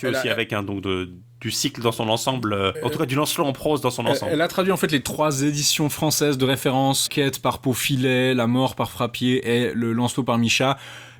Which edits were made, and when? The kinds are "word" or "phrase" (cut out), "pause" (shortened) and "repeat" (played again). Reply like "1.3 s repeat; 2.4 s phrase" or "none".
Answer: 2.7 s word; 7.1 s word